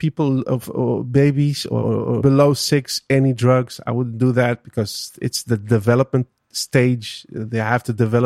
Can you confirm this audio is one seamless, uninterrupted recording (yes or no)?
no